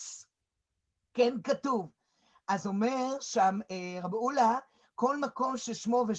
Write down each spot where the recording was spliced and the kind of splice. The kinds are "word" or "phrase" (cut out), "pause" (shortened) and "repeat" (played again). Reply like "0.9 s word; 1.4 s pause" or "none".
none